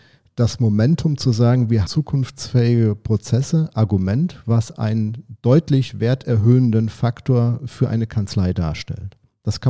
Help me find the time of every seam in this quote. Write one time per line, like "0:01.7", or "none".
0:01.9
0:03.7